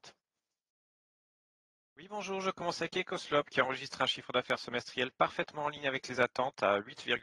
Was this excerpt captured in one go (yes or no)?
yes